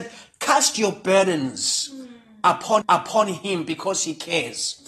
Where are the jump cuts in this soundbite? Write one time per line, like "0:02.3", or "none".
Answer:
0:02.8